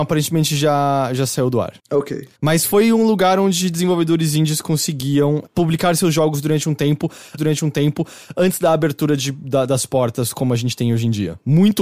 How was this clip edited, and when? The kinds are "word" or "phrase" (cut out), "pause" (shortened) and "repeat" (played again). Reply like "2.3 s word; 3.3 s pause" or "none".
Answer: 1.8 s pause; 2.4 s pause; 7.4 s repeat